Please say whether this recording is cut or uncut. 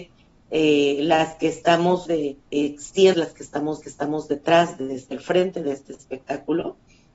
cut